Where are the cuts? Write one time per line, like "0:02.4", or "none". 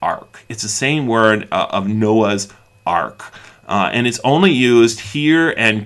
none